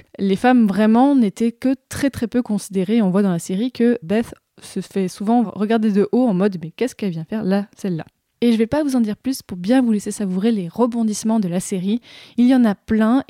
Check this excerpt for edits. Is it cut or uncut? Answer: uncut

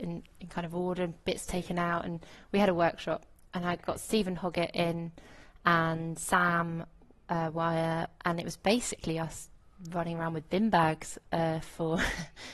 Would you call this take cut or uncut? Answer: uncut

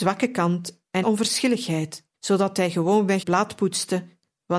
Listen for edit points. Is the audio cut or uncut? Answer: cut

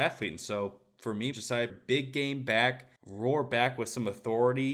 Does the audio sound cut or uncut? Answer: cut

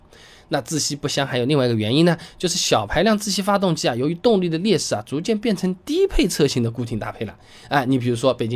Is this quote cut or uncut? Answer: uncut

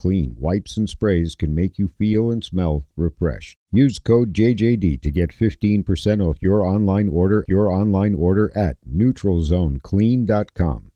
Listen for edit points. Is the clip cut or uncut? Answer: cut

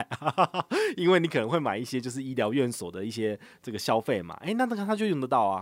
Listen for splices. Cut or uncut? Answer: uncut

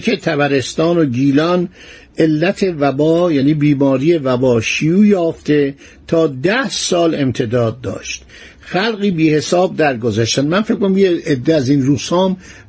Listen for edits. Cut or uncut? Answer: uncut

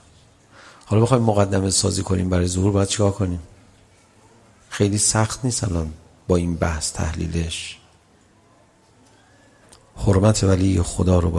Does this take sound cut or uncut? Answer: uncut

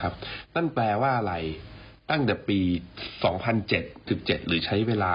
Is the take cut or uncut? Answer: cut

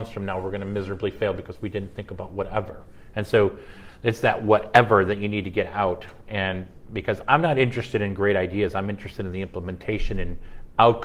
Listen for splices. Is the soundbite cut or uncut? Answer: uncut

